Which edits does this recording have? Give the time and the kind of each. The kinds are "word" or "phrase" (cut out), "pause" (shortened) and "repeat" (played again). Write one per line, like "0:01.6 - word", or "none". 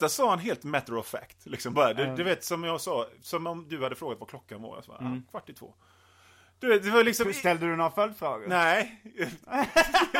none